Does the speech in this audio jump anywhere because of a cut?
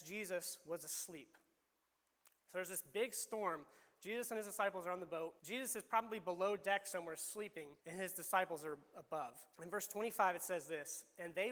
yes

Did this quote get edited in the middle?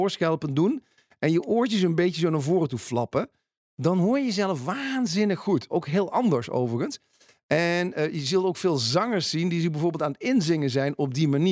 no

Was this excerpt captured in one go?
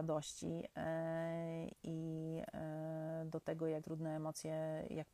no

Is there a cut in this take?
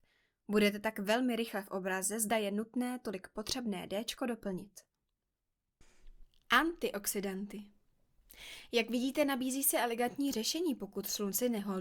no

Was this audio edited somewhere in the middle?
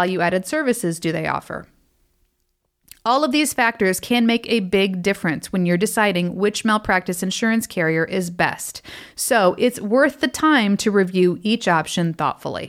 no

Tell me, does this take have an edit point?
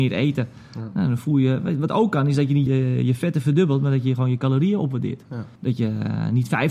yes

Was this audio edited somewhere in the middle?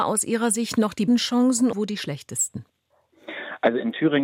yes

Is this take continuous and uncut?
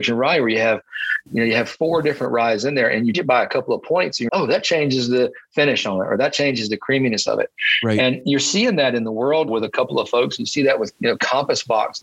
no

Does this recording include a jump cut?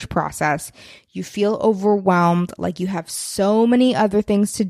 no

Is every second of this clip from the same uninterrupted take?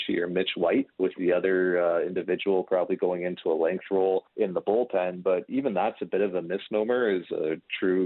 no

